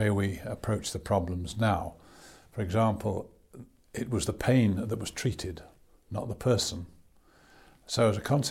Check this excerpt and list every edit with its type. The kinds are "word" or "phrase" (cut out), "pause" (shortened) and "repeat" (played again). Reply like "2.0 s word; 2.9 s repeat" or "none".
none